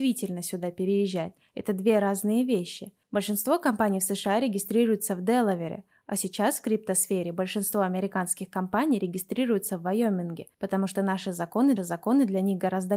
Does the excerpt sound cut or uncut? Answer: cut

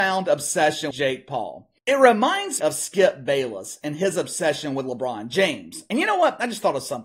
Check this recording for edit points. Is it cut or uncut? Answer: cut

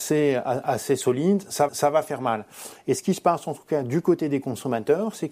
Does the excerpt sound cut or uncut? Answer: cut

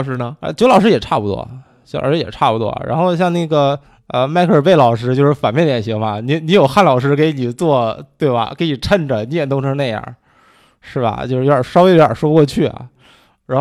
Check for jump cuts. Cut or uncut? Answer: cut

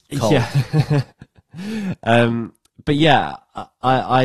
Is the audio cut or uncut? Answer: cut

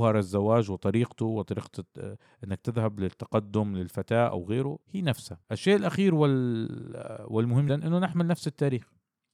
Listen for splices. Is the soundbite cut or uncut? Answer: cut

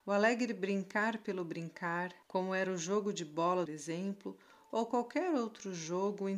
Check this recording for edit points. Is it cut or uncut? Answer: cut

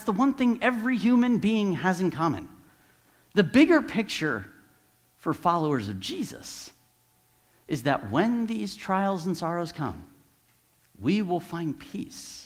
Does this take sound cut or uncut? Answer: uncut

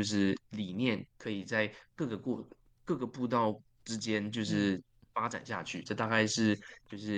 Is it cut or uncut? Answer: uncut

